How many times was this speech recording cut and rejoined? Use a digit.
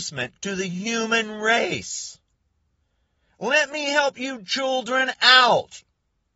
0